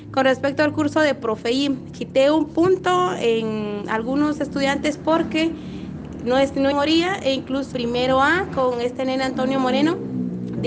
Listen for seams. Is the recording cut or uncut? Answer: cut